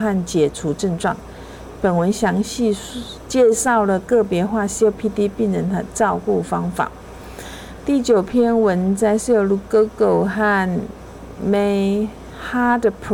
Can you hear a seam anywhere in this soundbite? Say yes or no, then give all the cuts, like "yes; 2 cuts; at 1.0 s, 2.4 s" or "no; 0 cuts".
no; 0 cuts